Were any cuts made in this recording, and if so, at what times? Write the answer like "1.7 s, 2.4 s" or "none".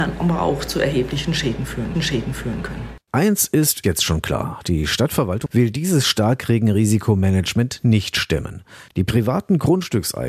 1.9 s, 3.8 s, 5.5 s